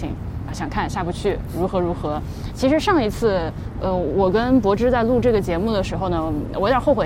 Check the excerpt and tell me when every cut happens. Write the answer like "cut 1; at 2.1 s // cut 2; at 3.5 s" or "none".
none